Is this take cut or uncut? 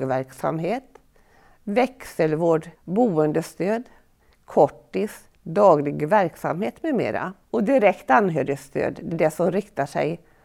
cut